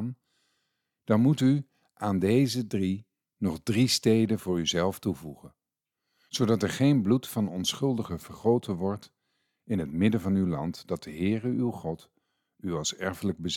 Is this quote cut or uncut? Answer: uncut